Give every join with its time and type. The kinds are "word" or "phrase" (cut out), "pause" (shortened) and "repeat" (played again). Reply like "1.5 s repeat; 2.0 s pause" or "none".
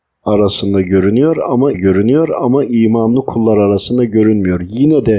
1.7 s repeat

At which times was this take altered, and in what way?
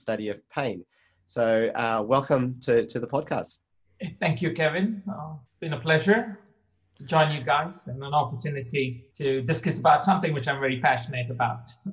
5.5 s pause; 9.1 s pause

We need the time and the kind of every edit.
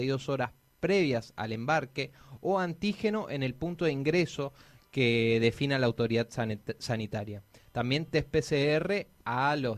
none

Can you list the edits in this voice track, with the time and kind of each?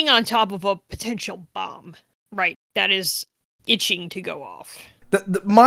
2.5 s word; 3.6 s word

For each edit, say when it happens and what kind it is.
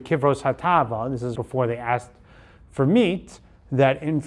1.3 s word

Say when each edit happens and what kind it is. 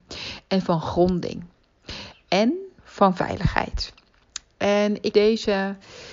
2.8 s pause; 5.1 s word

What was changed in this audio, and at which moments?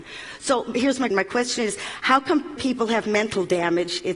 1.1 s word; 2.6 s word

